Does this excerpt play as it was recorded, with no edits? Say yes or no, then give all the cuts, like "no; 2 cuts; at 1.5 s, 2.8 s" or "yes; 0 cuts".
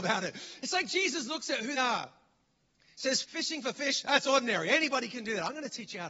no; 2 cuts; at 1.8 s, 3.2 s